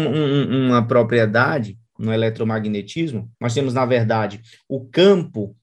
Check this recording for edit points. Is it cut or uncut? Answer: cut